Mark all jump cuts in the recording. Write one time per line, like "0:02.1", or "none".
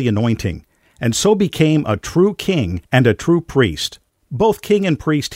0:02.8
0:04.1